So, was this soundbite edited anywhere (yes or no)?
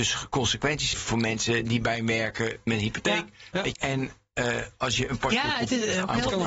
yes